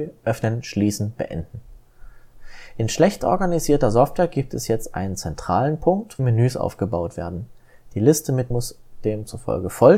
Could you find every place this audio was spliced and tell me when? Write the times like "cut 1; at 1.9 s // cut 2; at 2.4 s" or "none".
cut 1; at 6.2 s // cut 2; at 8.5 s